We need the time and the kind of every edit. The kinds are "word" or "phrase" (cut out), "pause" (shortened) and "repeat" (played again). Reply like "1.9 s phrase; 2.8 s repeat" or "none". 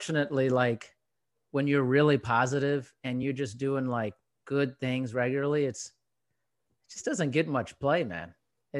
none